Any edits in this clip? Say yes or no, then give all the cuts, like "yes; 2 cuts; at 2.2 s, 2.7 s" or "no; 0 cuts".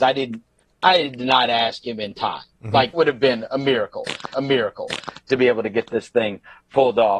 yes; 3 cuts; at 2.5 s, 2.9 s, 4.3 s